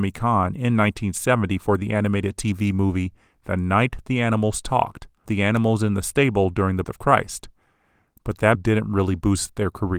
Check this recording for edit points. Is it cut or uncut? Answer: cut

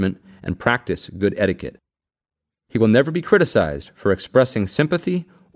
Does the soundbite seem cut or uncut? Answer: uncut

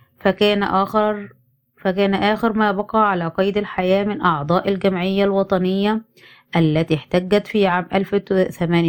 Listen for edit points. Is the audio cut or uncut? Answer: uncut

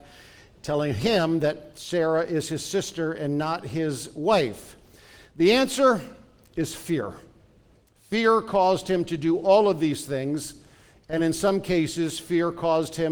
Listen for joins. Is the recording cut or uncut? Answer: uncut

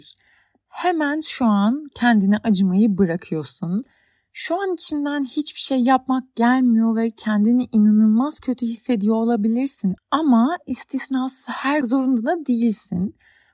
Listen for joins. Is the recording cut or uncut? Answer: cut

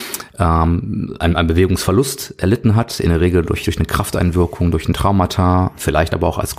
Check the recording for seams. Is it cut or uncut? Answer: uncut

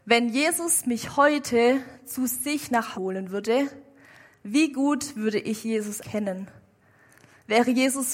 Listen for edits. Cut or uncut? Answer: cut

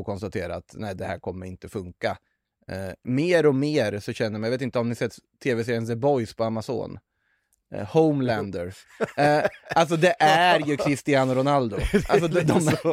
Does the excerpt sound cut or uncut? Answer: uncut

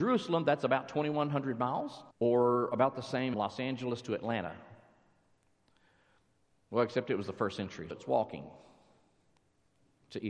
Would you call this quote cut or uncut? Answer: cut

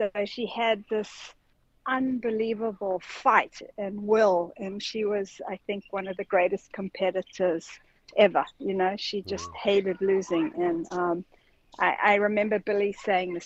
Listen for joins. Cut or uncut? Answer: uncut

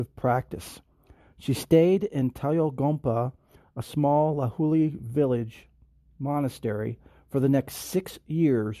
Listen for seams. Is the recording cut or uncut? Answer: uncut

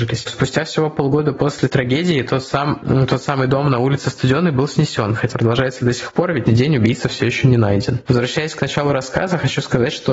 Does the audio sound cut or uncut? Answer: cut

